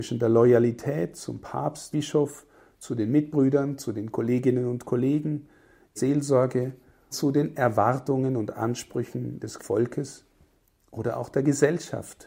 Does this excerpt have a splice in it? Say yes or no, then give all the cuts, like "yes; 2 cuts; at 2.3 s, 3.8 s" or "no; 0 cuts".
yes; 4 cuts; at 1.9 s, 6.0 s, 7.1 s, 9.6 s